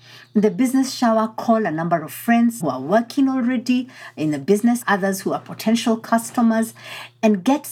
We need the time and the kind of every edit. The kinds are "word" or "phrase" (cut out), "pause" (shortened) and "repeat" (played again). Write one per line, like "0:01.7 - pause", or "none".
0:02.6 - word
0:04.8 - word